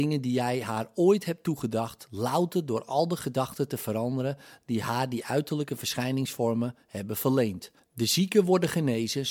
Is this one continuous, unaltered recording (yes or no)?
yes